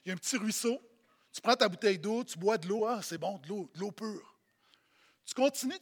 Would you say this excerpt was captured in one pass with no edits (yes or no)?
yes